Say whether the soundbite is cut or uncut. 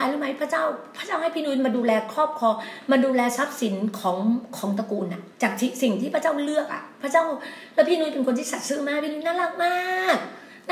cut